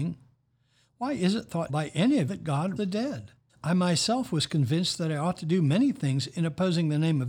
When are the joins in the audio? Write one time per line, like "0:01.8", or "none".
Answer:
0:01.7
0:02.3
0:02.8
0:03.5

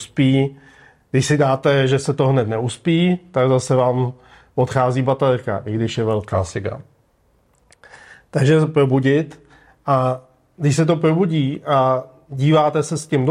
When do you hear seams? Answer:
none

